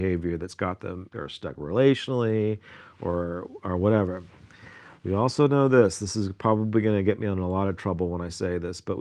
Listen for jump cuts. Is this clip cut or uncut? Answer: cut